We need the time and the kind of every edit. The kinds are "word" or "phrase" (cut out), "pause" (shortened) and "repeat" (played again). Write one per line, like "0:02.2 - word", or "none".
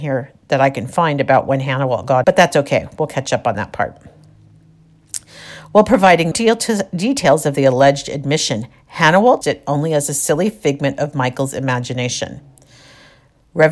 0:02.2 - word
0:06.3 - word
0:09.4 - word